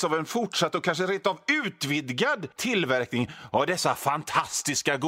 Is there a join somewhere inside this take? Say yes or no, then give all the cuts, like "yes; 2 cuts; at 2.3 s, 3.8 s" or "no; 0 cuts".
yes; 1 cut; at 2.5 s